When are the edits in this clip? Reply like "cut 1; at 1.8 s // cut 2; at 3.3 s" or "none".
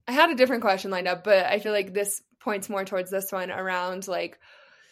none